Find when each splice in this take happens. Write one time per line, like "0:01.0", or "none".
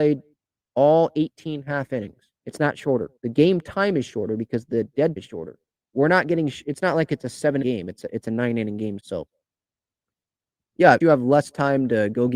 0:02.4
0:03.2
0:05.2
0:05.9
0:07.6
0:09.0
0:11.0

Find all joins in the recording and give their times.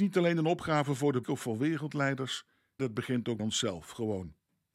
0:01.2
0:02.8
0:03.4

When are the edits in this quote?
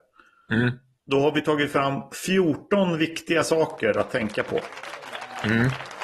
0:01.0

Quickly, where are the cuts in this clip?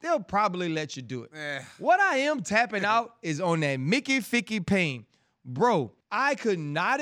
0:06.0

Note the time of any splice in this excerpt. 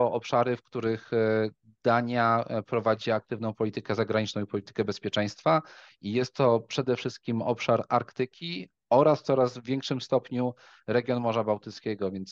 none

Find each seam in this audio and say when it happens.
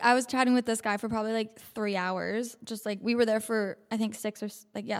none

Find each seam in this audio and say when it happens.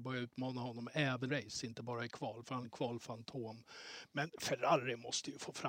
0:01.3
0:02.6

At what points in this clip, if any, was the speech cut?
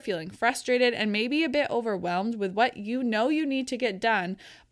none

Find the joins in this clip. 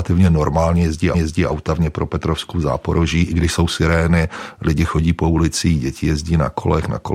0:01.1

